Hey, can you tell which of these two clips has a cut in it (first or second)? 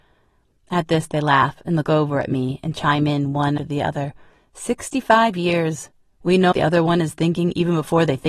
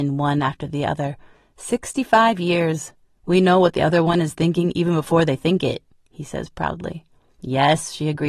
first